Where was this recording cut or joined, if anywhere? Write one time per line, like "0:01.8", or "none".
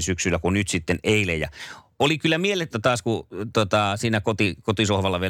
0:02.7